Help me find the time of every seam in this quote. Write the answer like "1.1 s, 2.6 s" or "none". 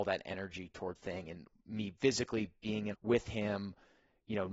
1.0 s, 2.0 s, 2.9 s